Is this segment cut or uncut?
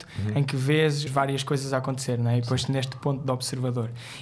cut